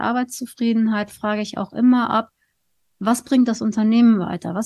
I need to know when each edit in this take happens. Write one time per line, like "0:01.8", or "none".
none